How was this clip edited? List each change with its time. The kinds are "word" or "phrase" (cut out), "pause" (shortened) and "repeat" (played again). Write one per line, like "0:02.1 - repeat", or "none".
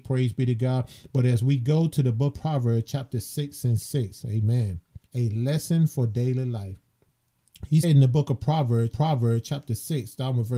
0:02.3 - word
0:05.1 - pause
0:07.8 - word
0:08.9 - repeat